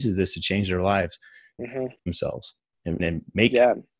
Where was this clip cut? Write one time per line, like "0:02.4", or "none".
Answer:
0:01.6
0:02.0
0:03.0